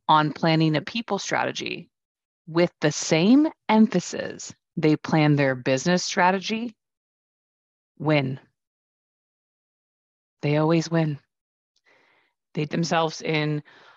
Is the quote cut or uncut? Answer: cut